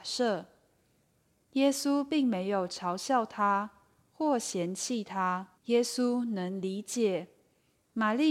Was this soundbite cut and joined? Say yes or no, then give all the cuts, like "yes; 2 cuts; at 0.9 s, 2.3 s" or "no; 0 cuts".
yes; 1 cut; at 5.6 s